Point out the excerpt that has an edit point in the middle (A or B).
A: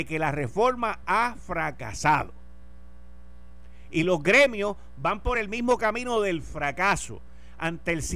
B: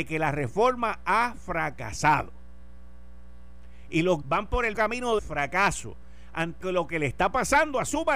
B